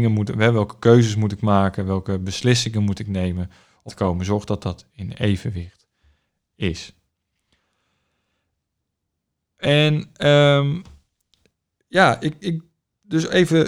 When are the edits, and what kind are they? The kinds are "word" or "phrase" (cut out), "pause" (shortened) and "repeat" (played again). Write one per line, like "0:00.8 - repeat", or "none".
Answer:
0:03.9 - word